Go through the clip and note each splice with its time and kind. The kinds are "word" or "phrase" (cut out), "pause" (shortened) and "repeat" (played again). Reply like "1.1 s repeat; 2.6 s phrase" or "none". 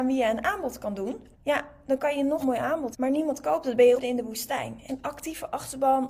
1.3 s pause; 2.4 s word; 2.9 s word; 4.0 s word; 4.9 s word